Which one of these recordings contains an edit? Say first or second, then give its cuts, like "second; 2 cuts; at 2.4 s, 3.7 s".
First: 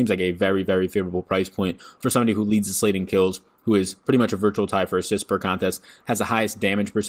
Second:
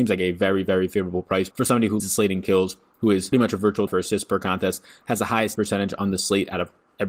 second; 5 cuts; at 1.5 s, 2.0 s, 3.3 s, 3.9 s, 5.6 s